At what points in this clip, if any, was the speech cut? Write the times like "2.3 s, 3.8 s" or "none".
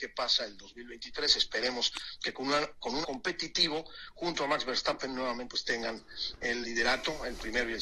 3.0 s, 5.5 s, 6.6 s